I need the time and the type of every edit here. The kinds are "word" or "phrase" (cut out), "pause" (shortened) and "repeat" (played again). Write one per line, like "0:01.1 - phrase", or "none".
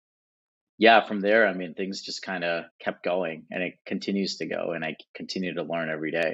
0:02.7 - pause